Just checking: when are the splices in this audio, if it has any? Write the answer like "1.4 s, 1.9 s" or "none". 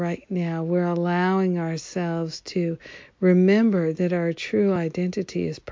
none